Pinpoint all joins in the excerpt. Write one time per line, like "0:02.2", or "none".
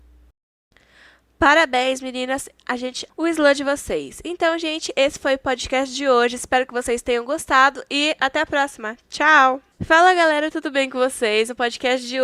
0:03.1
0:09.7